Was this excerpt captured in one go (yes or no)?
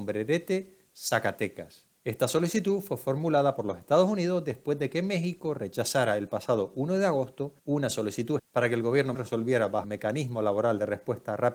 no